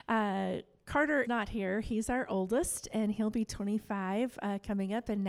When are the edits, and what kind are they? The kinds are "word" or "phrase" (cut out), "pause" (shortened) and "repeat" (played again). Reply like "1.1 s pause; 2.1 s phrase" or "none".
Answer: 1.2 s word